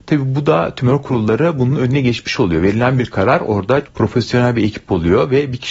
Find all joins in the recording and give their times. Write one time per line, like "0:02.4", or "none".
0:03.8